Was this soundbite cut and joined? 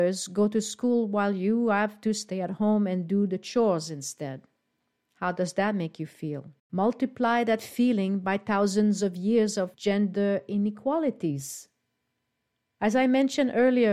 yes; 2 cuts; at 6.6 s, 9.7 s

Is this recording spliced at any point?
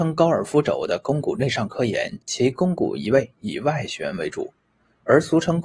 yes; 1 cut; at 2.2 s

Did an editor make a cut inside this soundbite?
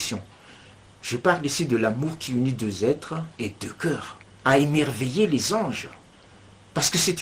yes; 1 cut; at 4.2 s

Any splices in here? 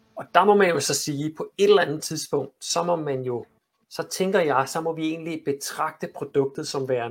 no; 0 cuts

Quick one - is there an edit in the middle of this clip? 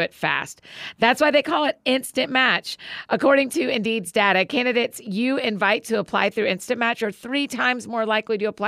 no; 0 cuts

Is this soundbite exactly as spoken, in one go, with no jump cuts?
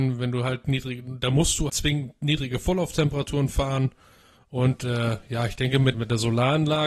no; 2 cuts; at 1.7 s, 5.9 s

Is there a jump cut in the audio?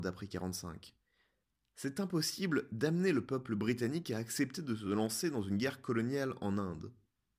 no; 0 cuts

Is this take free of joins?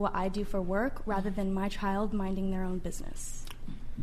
yes; 0 cuts

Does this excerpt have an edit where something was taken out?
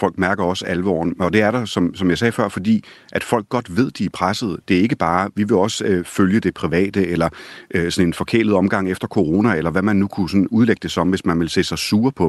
no; 0 cuts

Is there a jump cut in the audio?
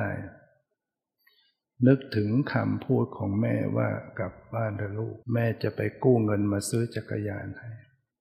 yes; 1 cut; at 5.2 s

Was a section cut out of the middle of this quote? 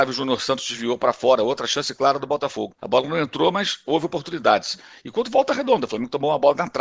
yes; 1 cut; at 2.8 s

